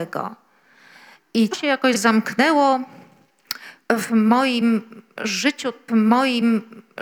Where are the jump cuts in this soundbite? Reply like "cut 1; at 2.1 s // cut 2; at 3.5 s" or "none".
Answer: cut 1; at 1.5 s // cut 2; at 5.9 s